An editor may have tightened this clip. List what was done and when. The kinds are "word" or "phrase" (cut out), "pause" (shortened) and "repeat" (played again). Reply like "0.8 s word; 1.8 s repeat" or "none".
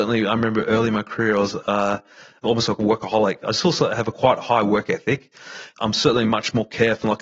none